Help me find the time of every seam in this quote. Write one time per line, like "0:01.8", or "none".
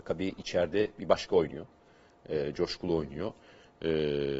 none